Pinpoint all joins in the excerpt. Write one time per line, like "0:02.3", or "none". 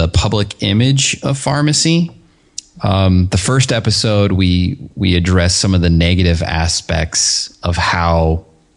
0:04.9